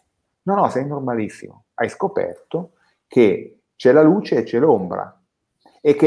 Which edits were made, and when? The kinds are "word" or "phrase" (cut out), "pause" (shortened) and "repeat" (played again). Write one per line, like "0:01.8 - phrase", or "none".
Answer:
none